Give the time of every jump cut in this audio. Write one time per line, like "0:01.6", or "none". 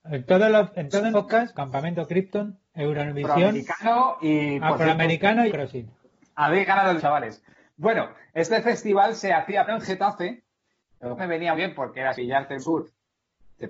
0:01.1
0:01.5
0:05.5
0:07.0
0:09.7
0:11.2
0:11.5
0:12.1
0:12.6